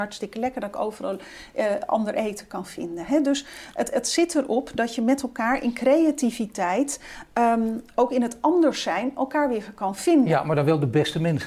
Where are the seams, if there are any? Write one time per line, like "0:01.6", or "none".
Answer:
none